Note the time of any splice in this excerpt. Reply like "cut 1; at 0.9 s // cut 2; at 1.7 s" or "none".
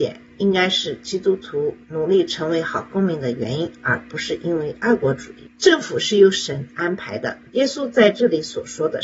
cut 1; at 1.8 s // cut 2; at 7.5 s